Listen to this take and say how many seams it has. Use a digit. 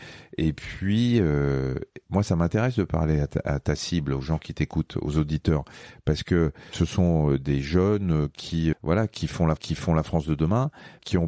2